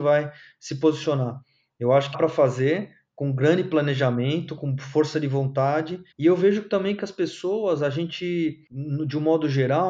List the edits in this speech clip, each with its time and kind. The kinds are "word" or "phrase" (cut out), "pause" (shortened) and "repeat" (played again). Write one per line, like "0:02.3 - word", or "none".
0:02.1 - phrase
0:06.1 - pause